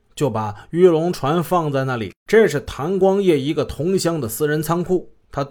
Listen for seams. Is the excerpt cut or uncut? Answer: cut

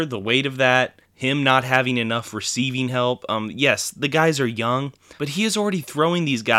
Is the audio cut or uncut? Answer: cut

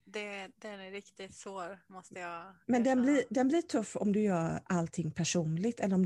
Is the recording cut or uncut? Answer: uncut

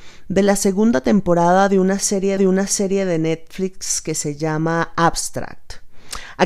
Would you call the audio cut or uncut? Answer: cut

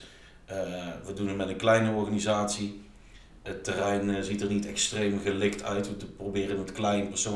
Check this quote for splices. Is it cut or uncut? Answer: uncut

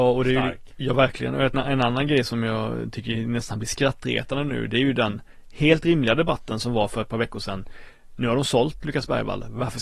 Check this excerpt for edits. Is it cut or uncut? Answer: cut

